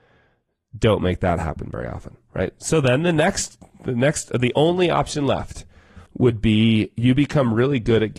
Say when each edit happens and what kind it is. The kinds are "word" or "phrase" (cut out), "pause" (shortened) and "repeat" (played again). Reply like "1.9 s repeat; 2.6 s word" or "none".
6.1 s pause